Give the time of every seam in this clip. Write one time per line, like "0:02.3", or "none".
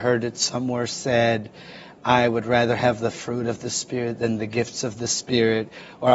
none